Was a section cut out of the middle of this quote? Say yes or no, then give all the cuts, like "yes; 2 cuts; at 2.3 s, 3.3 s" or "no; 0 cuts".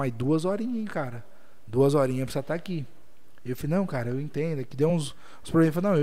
no; 0 cuts